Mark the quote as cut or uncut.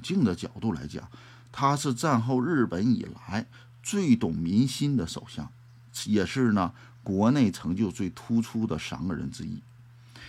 uncut